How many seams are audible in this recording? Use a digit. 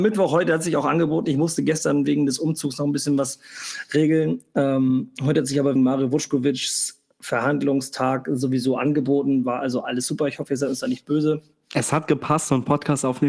1